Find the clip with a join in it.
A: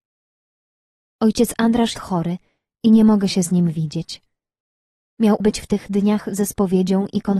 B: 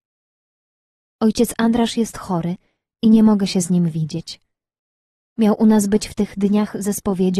A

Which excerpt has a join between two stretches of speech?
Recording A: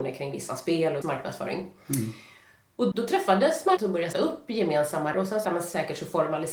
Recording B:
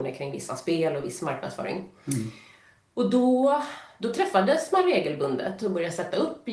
A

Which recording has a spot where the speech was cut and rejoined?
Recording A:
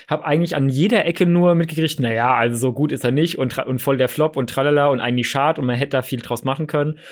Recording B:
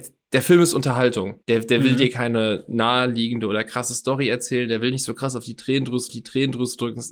B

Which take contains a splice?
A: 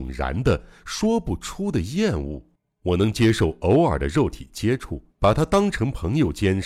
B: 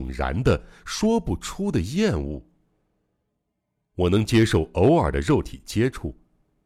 A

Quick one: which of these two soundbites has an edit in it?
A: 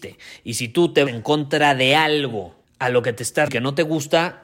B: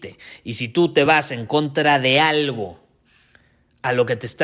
A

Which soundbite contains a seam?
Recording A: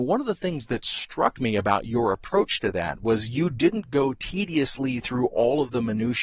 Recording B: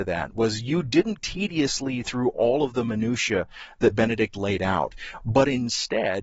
B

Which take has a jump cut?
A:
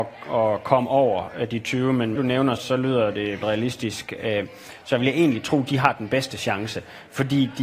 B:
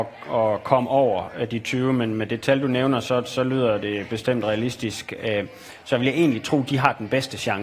A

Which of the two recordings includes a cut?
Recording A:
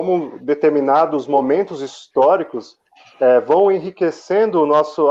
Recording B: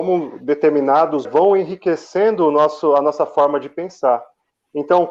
B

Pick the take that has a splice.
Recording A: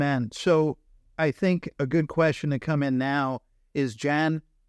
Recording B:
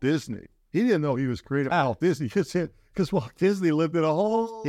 B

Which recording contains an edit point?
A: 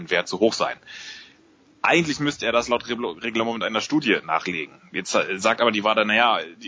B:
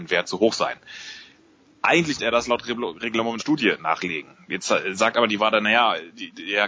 B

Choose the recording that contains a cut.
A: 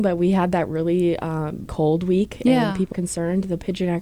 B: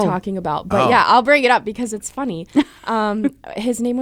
A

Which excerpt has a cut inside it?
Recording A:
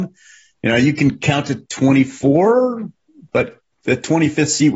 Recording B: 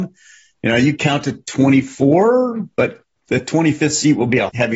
B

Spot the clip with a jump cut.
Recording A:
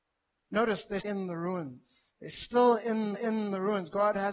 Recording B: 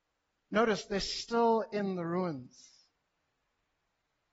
A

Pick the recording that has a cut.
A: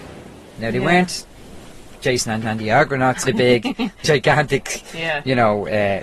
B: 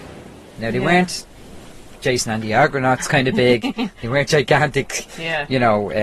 A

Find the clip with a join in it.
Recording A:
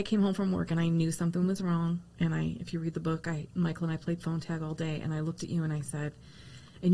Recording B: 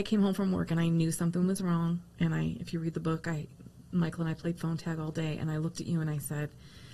A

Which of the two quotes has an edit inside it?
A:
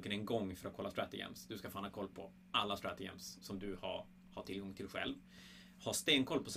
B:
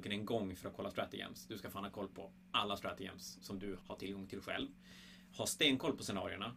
B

